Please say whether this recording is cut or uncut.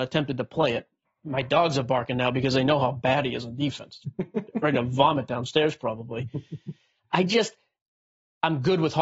cut